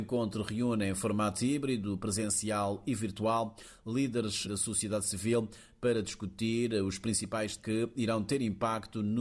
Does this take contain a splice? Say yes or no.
yes